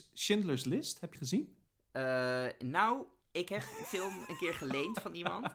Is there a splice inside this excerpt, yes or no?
yes